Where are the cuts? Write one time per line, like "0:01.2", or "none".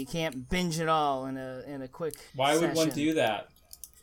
0:02.3